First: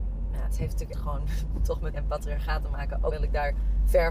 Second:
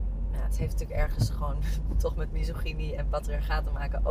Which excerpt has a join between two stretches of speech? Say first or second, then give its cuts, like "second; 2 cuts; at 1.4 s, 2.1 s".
first; 3 cuts; at 0.9 s, 1.9 s, 3.1 s